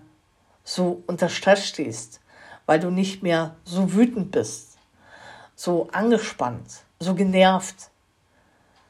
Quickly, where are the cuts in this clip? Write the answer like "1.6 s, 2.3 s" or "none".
none